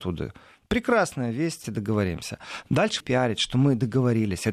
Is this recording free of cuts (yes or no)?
no